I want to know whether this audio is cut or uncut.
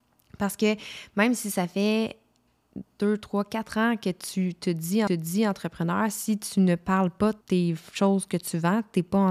cut